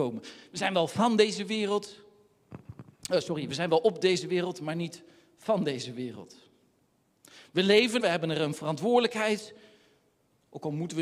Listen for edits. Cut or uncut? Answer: cut